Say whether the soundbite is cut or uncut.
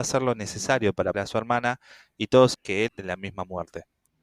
cut